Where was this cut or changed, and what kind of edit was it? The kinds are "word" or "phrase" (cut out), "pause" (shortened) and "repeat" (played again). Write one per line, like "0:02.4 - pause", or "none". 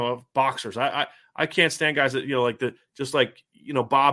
none